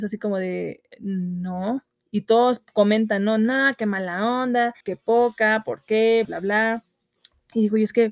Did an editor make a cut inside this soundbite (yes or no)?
yes